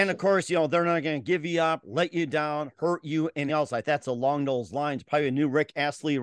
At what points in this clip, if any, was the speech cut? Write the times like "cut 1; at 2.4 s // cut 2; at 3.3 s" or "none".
cut 1; at 3.5 s // cut 2; at 3.8 s